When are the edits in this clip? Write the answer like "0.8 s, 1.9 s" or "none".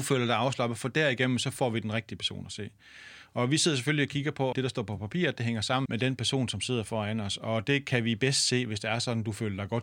4.5 s, 5.9 s